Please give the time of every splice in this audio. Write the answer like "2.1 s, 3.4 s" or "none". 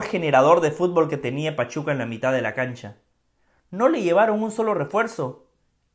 none